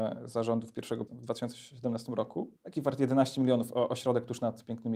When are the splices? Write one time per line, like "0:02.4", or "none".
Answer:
0:01.1
0:02.6